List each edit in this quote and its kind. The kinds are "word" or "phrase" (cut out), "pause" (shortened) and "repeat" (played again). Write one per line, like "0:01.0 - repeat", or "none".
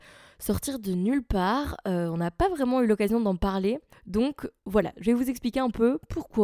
0:03.9 - pause